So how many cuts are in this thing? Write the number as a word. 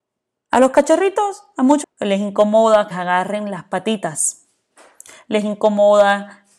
two